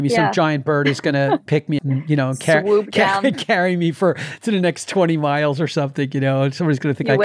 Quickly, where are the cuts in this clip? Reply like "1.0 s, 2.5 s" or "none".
1.8 s